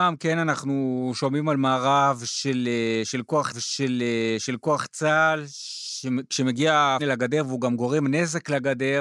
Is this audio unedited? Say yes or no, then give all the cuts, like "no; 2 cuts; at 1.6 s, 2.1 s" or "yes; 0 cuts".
no; 2 cuts; at 3.5 s, 7.0 s